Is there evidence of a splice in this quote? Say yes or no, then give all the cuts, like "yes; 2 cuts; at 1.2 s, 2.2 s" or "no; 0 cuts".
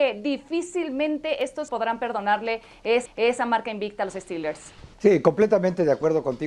yes; 3 cuts; at 1.7 s, 3.1 s, 4.9 s